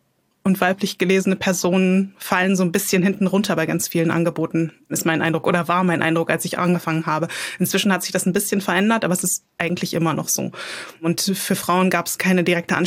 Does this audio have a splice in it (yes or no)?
no